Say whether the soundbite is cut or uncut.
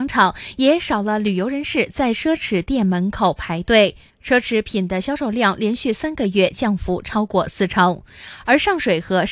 cut